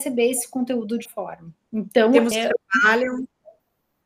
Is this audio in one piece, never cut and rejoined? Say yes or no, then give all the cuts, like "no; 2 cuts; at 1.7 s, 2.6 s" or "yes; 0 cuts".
no; 3 cuts; at 1.1 s, 1.6 s, 2.3 s